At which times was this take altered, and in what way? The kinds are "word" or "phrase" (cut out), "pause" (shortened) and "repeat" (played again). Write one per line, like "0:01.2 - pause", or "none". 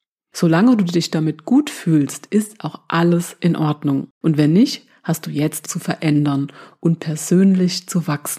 0:04.1 - pause
0:05.6 - phrase